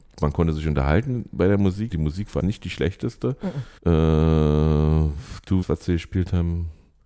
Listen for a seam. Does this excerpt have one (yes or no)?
yes